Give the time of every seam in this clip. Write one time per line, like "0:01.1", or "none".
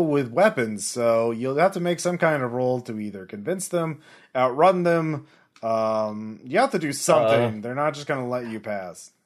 none